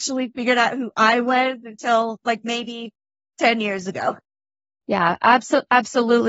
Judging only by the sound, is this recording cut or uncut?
uncut